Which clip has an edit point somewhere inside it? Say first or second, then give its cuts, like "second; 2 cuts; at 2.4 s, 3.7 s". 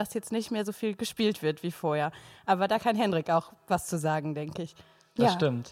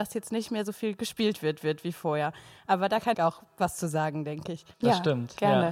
second; 3 cuts; at 1.6 s, 3.1 s, 4.7 s